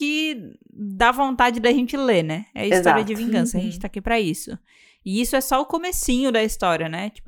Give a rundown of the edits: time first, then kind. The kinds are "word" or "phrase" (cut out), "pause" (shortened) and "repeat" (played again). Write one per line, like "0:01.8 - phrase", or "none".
none